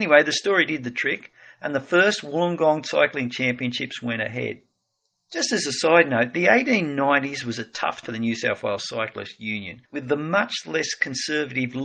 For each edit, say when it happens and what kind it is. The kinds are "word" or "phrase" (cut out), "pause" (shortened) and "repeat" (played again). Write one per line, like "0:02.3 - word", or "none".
0:08.0 - word
0:09.9 - pause